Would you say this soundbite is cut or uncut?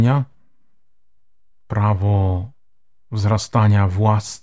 uncut